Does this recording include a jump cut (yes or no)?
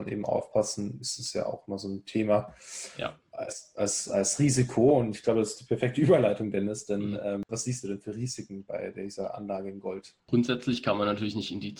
yes